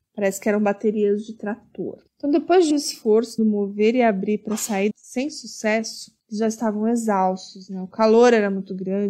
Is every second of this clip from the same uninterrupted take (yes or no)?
no